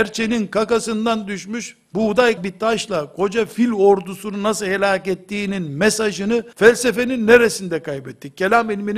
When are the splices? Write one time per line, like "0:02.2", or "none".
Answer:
0:02.4
0:06.5